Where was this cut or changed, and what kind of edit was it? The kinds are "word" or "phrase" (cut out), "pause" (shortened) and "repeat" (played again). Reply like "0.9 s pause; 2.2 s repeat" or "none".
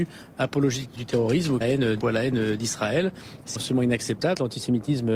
1.0 s word; 1.6 s phrase; 2.0 s word; 3.6 s word

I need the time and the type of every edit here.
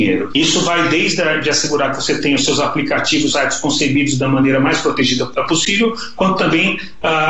3.3 s phrase

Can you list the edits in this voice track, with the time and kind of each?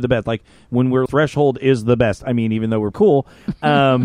1.1 s word; 2.9 s word

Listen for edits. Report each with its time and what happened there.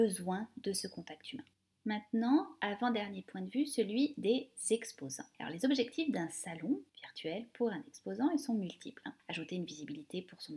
none

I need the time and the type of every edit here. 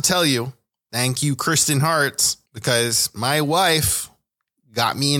2.5 s pause

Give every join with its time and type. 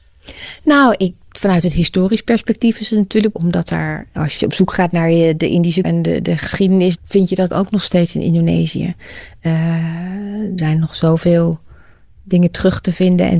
3.3 s word; 5.8 s word; 7.0 s word; 7.5 s word; 10.6 s word

